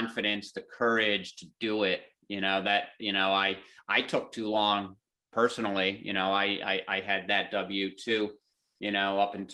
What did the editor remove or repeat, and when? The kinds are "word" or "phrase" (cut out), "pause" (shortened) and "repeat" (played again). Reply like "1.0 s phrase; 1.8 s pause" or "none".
none